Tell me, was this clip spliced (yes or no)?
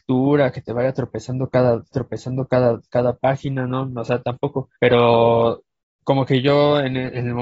yes